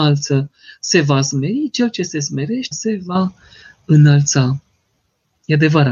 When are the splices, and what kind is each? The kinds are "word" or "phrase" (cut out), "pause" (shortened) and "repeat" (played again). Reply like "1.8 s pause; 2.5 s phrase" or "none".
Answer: 2.7 s word